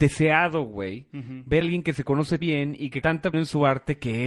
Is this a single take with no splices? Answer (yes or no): no